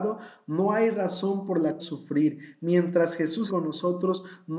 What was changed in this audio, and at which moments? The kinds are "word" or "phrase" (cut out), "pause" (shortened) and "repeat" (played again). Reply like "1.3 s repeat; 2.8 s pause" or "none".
1.8 s word; 3.5 s word